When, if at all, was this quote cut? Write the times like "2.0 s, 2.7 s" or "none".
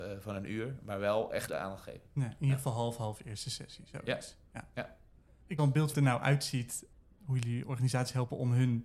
1.5 s, 5.6 s, 5.9 s